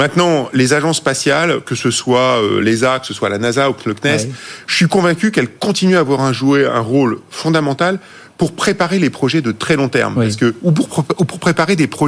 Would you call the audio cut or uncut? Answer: uncut